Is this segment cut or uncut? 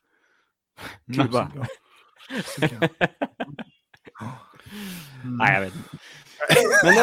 cut